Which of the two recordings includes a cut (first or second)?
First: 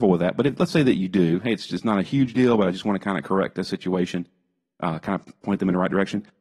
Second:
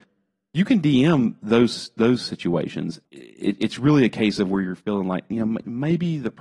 second